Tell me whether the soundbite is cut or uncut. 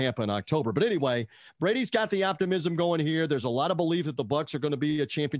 uncut